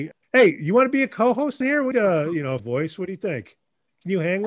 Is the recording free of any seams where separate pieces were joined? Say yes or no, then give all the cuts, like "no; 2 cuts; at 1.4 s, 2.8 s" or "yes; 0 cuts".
no; 3 cuts; at 1.6 s, 1.9 s, 2.6 s